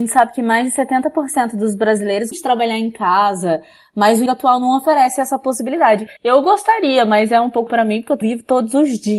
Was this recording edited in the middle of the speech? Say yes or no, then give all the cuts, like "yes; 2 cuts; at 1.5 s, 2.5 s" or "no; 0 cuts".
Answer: yes; 5 cuts; at 2.3 s, 4.3 s, 6.2 s, 7.7 s, 8.2 s